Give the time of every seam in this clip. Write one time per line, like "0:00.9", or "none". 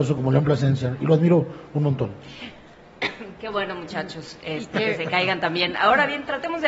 none